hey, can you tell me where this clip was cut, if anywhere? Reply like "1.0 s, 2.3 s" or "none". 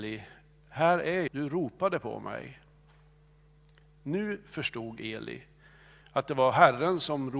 1.3 s